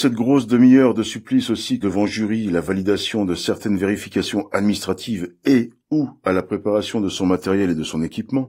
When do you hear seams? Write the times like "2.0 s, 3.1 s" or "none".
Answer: 1.8 s

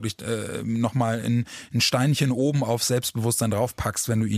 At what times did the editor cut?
none

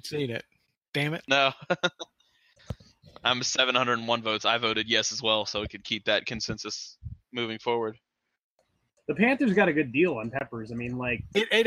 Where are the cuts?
none

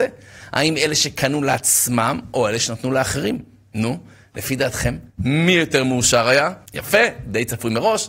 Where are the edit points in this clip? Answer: 5.1 s, 6.7 s

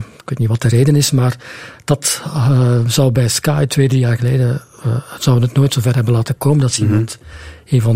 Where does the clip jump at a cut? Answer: none

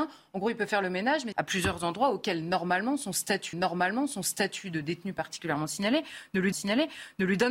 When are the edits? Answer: 1.3 s, 3.5 s, 6.5 s

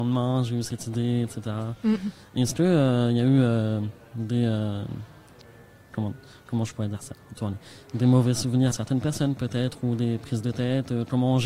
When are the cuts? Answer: 7.4 s, 8.7 s

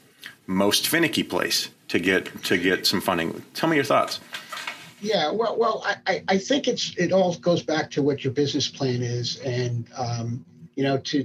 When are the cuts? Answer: none

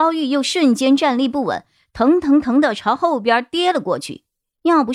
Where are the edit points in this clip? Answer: none

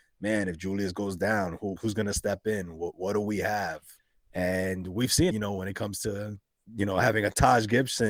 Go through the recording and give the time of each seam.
1.8 s, 4.0 s, 5.3 s, 6.5 s

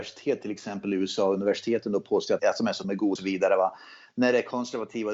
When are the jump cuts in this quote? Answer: 2.4 s, 2.8 s, 3.2 s

